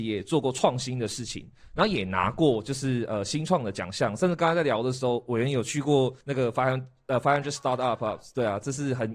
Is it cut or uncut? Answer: cut